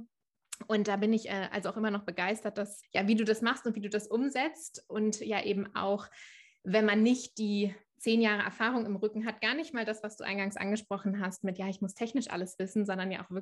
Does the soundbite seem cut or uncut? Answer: cut